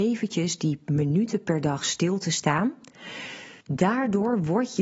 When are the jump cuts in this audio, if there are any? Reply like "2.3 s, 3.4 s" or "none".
3.6 s